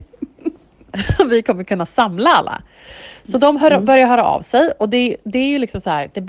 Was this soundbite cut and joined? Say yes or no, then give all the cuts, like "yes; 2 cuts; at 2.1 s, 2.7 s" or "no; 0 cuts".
no; 0 cuts